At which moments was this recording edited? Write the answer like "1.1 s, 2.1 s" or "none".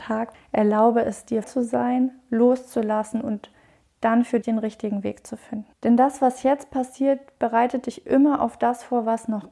1.4 s, 4.4 s, 5.7 s

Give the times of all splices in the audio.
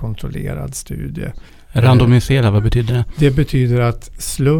1.5 s

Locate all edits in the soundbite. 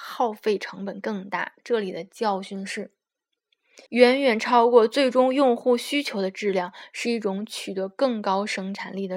3.9 s

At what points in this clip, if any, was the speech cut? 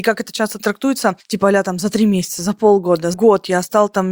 3.1 s

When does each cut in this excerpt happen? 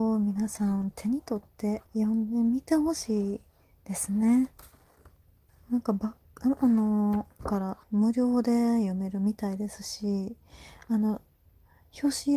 1.9 s, 5.5 s, 7.4 s, 7.8 s

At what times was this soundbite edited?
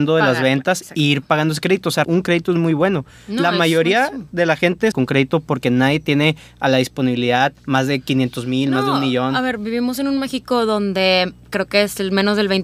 2.0 s, 4.9 s, 7.6 s

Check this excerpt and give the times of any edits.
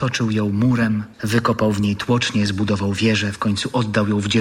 1.1 s

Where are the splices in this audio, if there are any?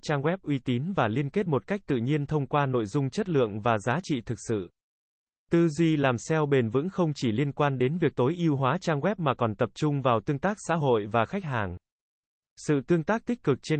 none

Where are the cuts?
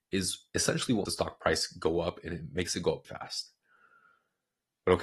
1.1 s, 3.0 s

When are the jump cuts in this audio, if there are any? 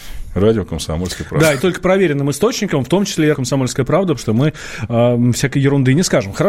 1.6 s, 3.3 s, 4.2 s

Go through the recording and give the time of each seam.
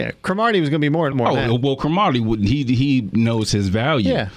1.1 s

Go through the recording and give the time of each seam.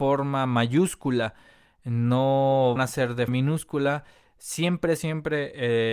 2.8 s, 3.3 s, 5.0 s

